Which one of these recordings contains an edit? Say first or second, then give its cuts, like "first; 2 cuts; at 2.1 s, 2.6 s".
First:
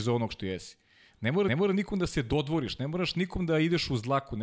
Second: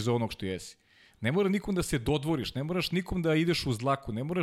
first; 1 cut; at 1.5 s